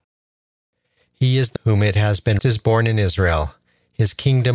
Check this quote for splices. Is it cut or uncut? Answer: cut